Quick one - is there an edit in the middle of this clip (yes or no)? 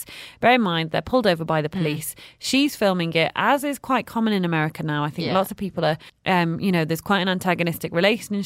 yes